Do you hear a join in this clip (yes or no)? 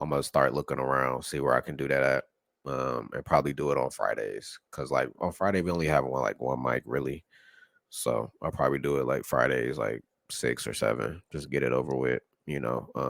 no